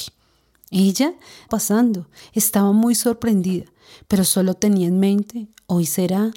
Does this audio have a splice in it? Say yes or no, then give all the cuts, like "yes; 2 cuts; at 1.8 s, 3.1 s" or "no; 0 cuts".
yes; 1 cut; at 1.5 s